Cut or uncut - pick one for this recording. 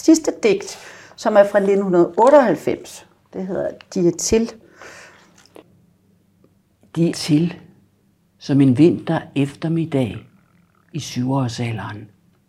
cut